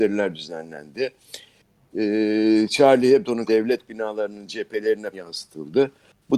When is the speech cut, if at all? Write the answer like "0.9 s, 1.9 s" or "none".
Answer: 3.5 s, 5.1 s